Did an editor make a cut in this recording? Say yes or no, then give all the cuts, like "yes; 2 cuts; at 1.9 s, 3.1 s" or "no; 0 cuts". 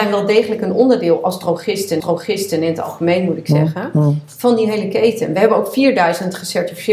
yes; 1 cut; at 2.0 s